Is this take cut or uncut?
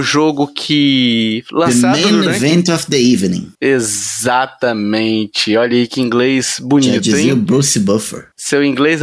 uncut